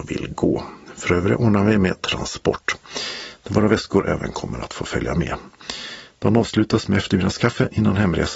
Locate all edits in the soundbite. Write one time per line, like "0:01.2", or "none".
none